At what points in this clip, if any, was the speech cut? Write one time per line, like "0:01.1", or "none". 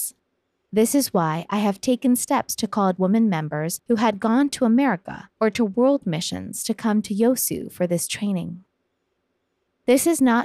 0:02.9